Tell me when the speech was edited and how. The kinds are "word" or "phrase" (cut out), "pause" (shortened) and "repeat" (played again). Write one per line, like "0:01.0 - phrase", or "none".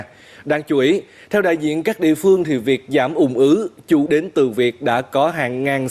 0:04.1 - word